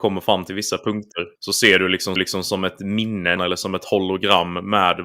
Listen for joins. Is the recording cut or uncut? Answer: cut